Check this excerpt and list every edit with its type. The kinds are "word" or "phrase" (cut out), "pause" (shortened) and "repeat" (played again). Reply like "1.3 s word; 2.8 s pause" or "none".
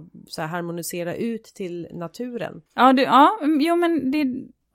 2.7 s pause

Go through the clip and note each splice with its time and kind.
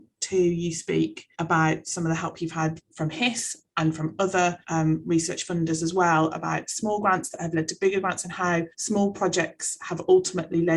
1.3 s pause; 4.6 s pause; 8.7 s pause

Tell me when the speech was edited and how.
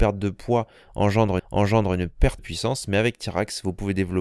1.4 s repeat; 2.4 s word

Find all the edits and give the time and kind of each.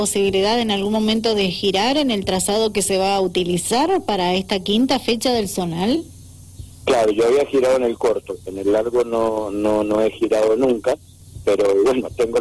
none

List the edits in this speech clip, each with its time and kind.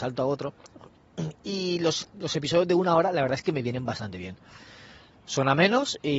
none

